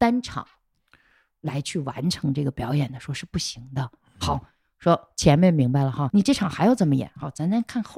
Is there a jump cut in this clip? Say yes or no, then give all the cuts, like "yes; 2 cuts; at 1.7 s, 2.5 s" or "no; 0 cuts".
yes; 1 cut; at 6.1 s